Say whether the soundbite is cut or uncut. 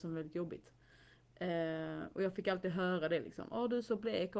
uncut